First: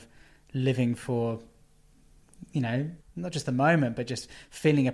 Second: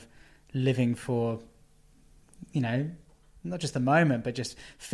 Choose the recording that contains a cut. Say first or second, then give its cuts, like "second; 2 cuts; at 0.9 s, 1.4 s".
first; 1 cut; at 3.0 s